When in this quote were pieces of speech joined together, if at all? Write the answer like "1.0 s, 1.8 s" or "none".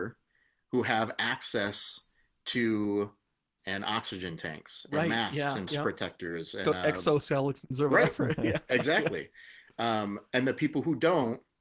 3.6 s, 5.7 s, 6.6 s, 7.7 s

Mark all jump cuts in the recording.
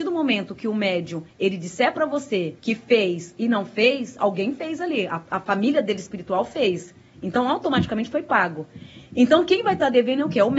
1.3 s, 2.6 s, 4.2 s, 9.1 s

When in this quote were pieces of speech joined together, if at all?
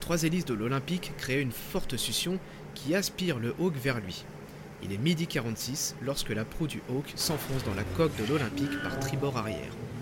none

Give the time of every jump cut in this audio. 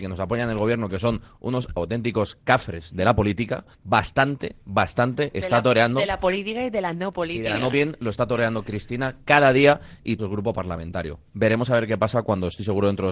3.7 s, 7.7 s, 10.2 s

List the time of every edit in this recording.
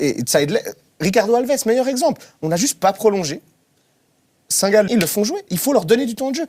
4.9 s

